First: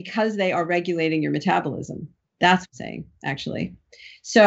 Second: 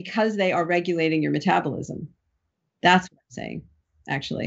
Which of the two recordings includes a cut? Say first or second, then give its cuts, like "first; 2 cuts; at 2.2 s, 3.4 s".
first; 3 cuts; at 2.2 s, 2.7 s, 3.1 s